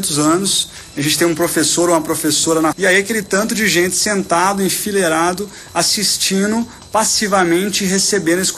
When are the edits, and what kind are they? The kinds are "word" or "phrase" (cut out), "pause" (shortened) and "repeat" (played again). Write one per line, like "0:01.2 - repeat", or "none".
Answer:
0:02.7 - word